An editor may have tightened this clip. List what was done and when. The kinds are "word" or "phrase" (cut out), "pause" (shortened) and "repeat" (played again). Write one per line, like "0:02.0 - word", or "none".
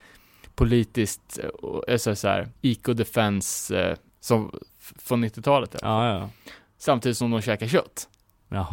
0:02.5 - pause
0:04.7 - pause